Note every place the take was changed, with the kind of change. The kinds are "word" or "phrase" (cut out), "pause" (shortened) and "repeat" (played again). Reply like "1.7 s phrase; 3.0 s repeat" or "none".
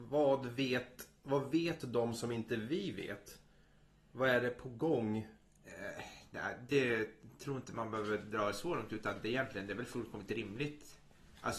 none